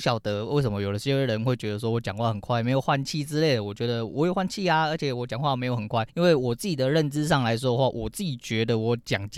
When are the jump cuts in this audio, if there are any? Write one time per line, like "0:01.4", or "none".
0:06.1